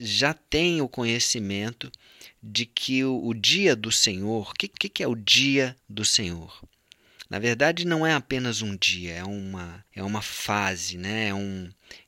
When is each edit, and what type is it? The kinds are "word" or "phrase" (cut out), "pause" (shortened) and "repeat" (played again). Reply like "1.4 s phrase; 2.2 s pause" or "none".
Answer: 4.7 s repeat; 5.8 s pause; 9.9 s pause